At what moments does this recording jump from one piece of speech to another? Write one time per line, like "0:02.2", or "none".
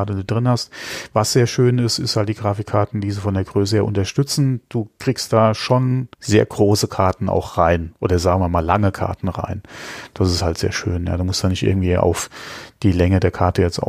0:06.1